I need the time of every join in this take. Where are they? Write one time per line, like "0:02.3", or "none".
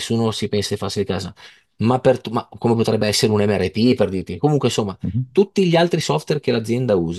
none